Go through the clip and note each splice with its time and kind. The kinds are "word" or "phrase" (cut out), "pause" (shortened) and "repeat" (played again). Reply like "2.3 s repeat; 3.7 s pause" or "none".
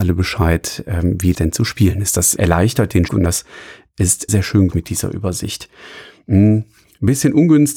1.3 s word; 2.4 s word; 3.1 s word; 4.3 s word; 4.7 s word